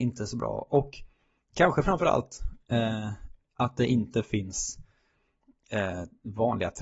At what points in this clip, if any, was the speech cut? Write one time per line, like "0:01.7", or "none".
none